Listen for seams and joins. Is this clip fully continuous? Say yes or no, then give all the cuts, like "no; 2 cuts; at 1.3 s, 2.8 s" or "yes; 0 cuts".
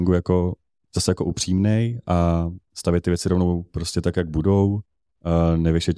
yes; 0 cuts